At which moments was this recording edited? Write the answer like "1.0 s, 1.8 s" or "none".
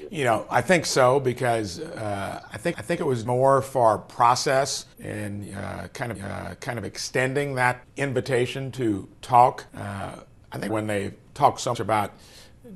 2.7 s, 3.3 s, 4.9 s, 6.1 s, 7.8 s, 9.7 s, 10.7 s, 11.7 s